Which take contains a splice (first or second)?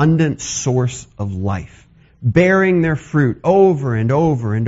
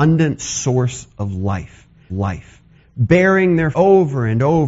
second